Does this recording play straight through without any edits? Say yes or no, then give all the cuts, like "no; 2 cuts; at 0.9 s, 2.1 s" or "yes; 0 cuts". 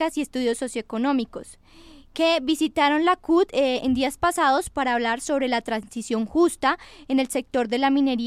yes; 0 cuts